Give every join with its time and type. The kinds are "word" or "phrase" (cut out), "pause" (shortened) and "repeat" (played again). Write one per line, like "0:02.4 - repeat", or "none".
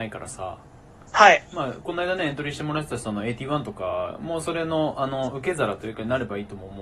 none